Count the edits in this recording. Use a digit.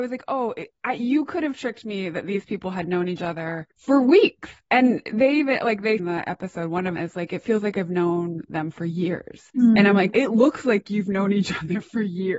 4